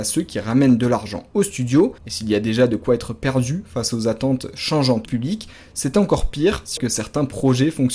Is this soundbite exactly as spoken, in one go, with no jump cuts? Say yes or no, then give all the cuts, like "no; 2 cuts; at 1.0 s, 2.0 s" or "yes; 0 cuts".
no; 3 cuts; at 2.0 s, 5.0 s, 6.8 s